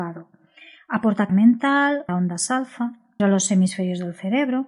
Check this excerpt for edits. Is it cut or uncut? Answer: cut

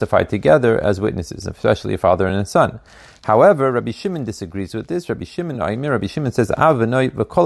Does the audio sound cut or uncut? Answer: uncut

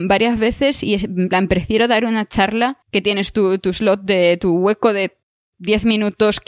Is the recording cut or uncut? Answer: cut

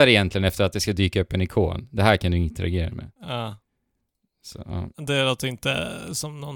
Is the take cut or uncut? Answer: cut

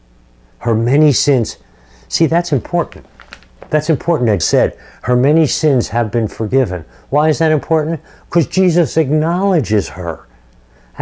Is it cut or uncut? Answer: cut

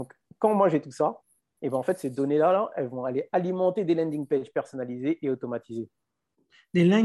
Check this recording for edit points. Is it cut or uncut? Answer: uncut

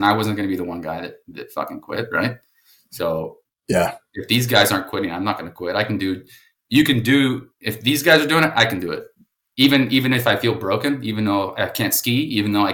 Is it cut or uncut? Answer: uncut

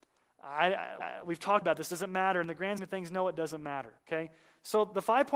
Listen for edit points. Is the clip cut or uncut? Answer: cut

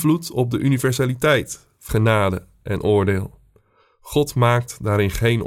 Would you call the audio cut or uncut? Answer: cut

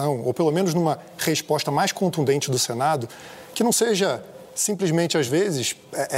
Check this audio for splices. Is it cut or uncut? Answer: uncut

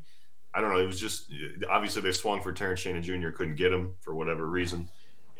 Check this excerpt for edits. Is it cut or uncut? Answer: uncut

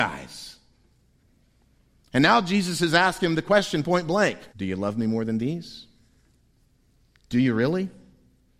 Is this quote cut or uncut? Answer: cut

